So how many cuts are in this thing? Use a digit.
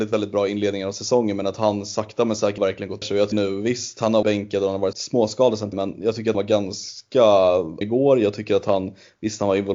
8